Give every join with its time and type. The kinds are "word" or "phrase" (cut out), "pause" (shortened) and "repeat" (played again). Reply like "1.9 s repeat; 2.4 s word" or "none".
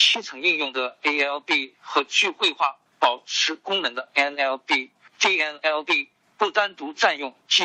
2.9 s pause